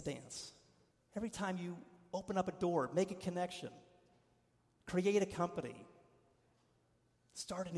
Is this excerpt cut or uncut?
cut